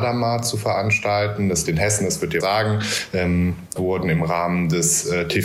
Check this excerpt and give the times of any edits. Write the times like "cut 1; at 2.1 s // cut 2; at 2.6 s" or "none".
cut 1; at 1.7 s // cut 2; at 2.4 s // cut 3; at 3.8 s